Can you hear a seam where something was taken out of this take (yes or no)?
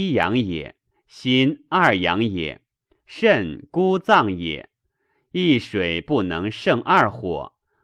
no